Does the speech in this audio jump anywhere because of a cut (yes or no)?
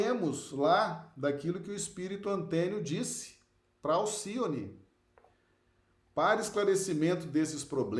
no